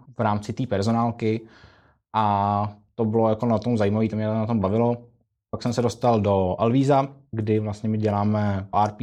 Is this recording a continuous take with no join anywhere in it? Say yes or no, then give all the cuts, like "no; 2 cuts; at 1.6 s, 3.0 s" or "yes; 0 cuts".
yes; 0 cuts